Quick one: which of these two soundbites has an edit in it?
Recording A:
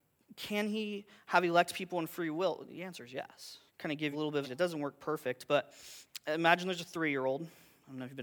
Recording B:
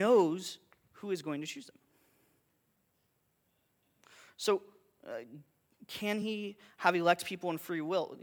A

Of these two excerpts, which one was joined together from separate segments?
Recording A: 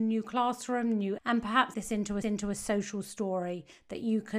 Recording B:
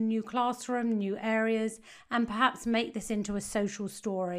A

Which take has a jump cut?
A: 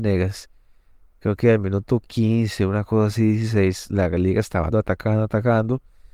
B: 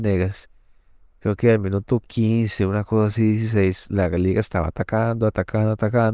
A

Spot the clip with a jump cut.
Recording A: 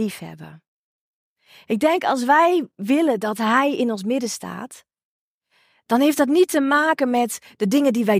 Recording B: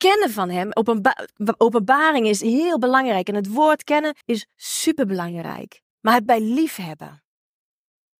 B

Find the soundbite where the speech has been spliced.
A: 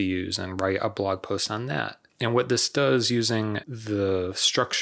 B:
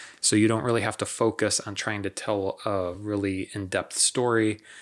A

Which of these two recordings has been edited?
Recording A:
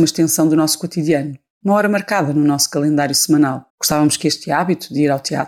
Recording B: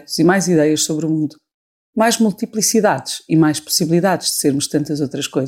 A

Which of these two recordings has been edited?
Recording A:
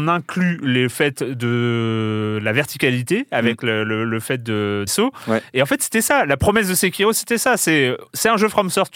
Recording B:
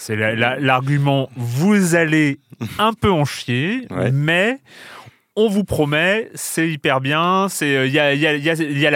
A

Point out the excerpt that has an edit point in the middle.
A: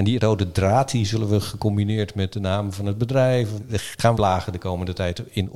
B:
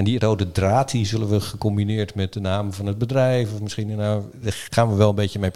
A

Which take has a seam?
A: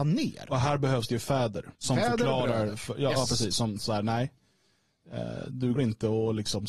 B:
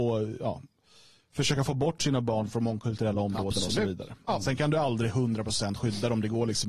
A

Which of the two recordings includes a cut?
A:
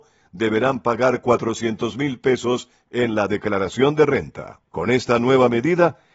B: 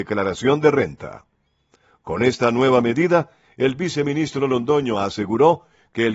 A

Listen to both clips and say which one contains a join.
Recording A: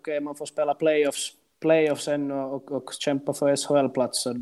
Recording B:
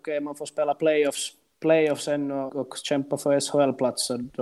B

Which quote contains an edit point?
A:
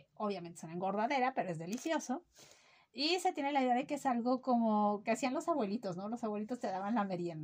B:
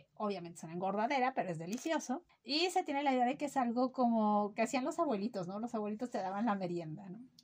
B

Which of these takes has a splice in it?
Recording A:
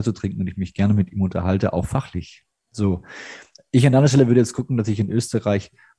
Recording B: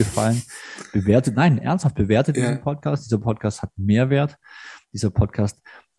A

